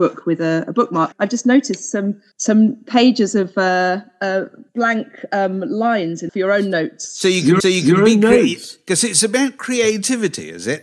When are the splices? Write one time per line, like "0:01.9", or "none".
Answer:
0:01.1
0:02.3
0:04.7
0:06.3
0:07.6